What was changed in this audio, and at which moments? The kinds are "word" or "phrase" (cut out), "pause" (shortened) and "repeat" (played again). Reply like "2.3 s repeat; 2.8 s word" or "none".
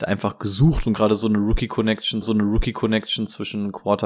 2.2 s repeat